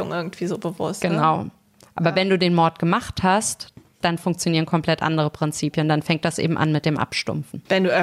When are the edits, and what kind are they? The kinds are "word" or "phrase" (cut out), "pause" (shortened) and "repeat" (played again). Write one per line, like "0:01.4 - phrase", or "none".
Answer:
none